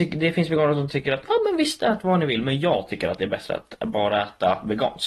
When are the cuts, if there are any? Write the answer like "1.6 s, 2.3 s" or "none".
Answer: none